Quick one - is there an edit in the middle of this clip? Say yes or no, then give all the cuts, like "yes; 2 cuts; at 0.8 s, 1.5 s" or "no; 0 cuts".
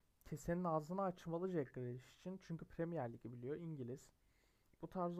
no; 0 cuts